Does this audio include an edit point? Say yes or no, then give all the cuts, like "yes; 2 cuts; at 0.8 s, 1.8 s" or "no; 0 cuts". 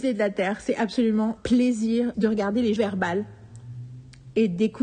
yes; 3 cuts; at 1.4 s, 2.1 s, 2.8 s